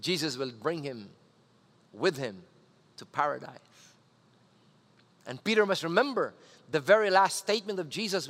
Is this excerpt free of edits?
yes; 0 cuts

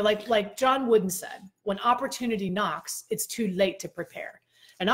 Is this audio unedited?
yes; 0 cuts

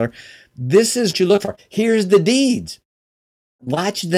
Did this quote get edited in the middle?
yes; 1 cut; at 1.1 s

